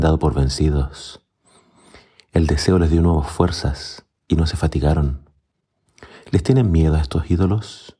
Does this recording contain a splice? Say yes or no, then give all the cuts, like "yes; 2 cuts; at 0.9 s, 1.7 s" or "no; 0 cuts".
no; 0 cuts